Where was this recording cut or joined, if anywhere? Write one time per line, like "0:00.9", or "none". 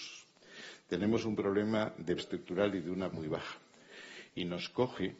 0:02.2
0:03.1